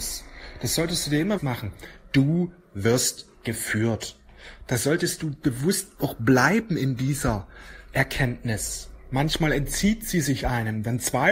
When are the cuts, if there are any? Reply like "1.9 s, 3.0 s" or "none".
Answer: 1.4 s